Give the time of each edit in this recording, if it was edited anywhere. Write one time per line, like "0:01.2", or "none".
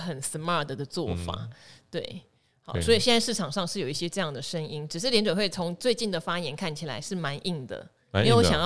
none